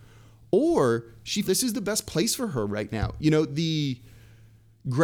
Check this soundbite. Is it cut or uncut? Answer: cut